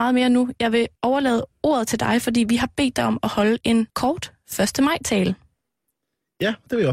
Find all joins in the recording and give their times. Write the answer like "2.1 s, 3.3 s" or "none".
1.0 s, 3.9 s